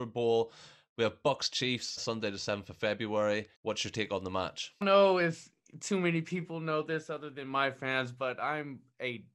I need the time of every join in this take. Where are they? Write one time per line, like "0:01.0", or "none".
0:02.0
0:03.5
0:04.8